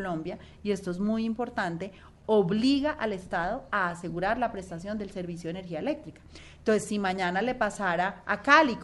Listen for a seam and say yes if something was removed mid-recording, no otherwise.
no